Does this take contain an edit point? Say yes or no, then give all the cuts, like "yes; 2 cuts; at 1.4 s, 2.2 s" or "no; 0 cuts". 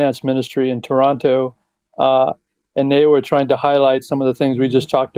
no; 0 cuts